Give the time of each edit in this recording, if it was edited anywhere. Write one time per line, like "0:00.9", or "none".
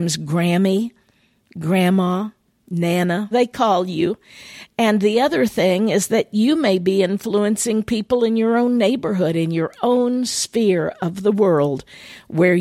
0:03.3